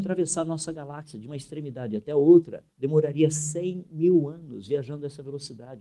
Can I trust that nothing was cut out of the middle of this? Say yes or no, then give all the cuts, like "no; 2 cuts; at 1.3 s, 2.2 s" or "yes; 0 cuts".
no; 1 cut; at 2.7 s